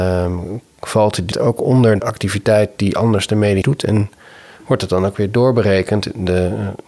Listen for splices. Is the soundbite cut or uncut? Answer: cut